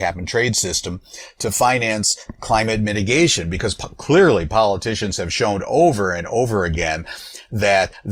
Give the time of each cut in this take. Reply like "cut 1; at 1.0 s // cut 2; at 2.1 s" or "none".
none